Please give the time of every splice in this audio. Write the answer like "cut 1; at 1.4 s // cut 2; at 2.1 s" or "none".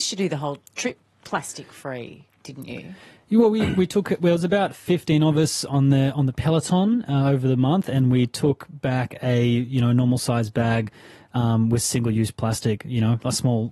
none